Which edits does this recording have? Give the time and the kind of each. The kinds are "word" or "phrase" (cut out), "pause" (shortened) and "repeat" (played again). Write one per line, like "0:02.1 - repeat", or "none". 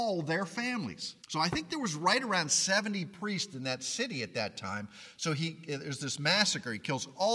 0:01.2 - pause